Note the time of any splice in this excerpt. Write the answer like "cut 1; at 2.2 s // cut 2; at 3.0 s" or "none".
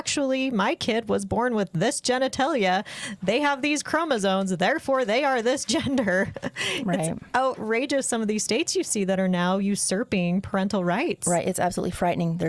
none

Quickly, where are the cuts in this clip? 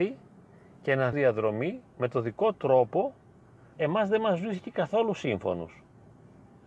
cut 1; at 1.1 s // cut 2; at 2.5 s // cut 3; at 3.7 s

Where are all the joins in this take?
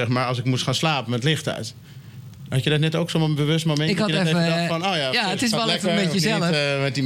none

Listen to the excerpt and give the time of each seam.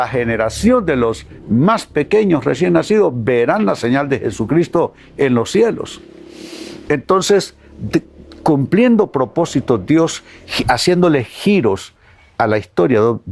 none

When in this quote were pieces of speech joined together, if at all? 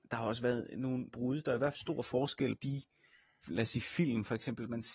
cut 1; at 1.1 s // cut 2; at 1.7 s // cut 3; at 2.6 s // cut 4; at 3.4 s

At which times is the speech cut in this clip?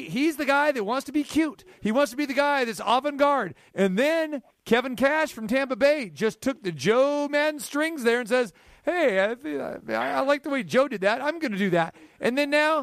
none

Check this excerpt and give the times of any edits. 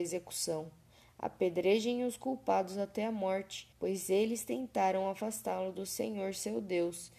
cut 1; at 3.7 s

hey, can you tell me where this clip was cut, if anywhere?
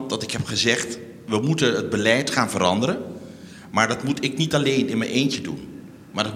none

